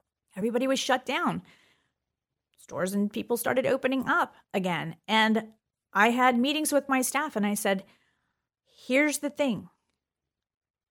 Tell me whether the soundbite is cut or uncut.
uncut